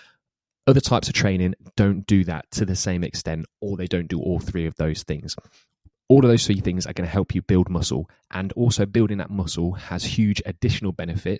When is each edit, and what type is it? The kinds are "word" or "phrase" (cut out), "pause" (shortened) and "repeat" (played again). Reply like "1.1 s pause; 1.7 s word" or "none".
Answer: none